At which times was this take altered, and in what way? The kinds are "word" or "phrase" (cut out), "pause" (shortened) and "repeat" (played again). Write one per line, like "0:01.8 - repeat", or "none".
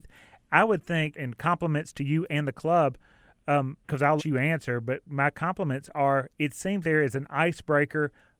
0:01.1 - word
0:03.8 - pause
0:04.2 - word
0:06.8 - word